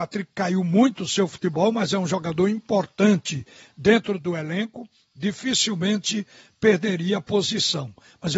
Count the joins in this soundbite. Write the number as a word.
zero